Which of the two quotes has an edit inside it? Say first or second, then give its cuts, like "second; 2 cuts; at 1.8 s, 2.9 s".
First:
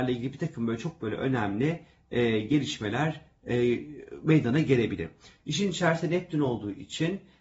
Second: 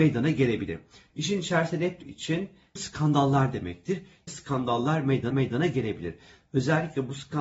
second; 4 cuts; at 2.0 s, 2.8 s, 4.3 s, 5.3 s